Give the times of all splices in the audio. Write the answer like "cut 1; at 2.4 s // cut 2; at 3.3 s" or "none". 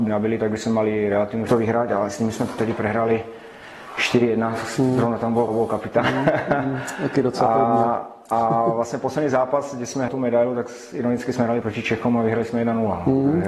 cut 1; at 1.5 s // cut 2; at 5.5 s // cut 3; at 10.1 s // cut 4; at 11.6 s